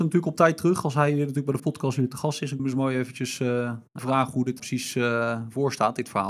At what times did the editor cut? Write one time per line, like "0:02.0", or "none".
0:01.6
0:02.6
0:04.0
0:04.6